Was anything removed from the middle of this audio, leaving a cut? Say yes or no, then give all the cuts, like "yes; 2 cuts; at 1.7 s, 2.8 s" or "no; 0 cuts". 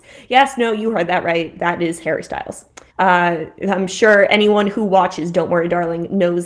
yes; 1 cut; at 2.9 s